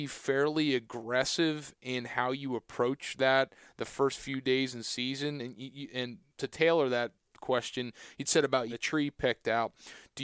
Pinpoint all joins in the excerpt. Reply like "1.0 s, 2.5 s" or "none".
6.3 s, 8.7 s